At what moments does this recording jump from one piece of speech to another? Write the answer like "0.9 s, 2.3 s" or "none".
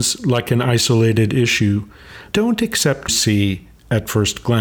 2.3 s, 3.1 s